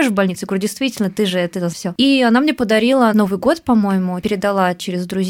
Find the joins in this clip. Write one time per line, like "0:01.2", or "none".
0:01.7
0:03.1